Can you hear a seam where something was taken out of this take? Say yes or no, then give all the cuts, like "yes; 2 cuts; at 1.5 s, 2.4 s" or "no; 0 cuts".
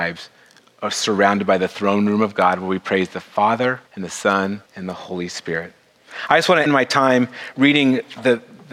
yes; 3 cuts; at 3.9 s, 4.7 s, 6.7 s